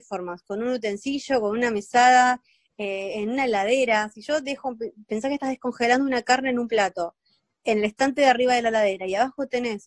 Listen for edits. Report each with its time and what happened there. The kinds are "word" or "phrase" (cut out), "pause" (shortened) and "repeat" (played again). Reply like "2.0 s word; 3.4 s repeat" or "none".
none